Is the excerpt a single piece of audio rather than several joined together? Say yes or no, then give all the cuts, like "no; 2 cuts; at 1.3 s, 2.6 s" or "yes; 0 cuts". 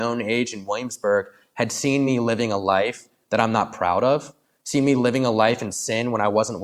yes; 0 cuts